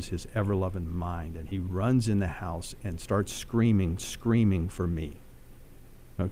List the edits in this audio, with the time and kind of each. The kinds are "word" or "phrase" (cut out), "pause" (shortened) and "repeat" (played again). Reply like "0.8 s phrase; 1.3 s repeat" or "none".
4.0 s repeat